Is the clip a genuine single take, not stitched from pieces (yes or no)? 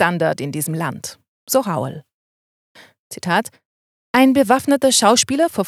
yes